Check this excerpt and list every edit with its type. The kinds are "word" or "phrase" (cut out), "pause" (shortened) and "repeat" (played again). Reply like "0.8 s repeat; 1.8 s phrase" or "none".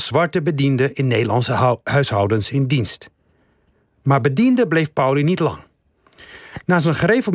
none